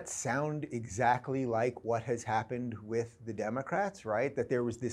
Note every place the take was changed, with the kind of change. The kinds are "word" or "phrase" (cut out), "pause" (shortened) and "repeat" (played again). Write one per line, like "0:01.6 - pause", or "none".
none